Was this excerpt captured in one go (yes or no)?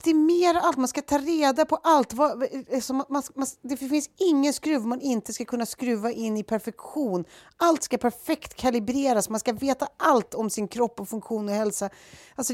yes